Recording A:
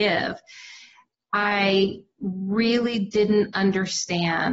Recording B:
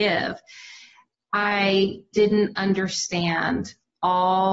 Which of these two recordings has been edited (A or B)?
B